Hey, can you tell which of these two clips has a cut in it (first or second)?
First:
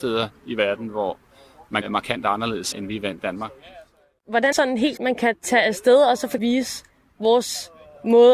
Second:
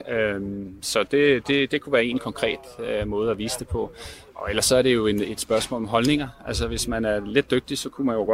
first